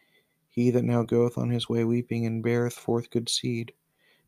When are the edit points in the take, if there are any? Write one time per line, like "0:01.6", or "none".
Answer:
none